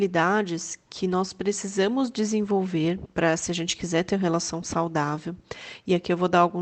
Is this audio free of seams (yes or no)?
no